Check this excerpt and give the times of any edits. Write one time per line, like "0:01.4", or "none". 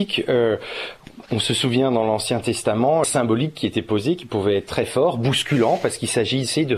0:03.0